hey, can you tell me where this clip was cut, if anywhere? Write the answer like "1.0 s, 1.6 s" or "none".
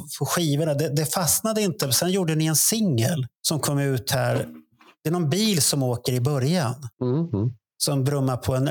3.4 s, 6.9 s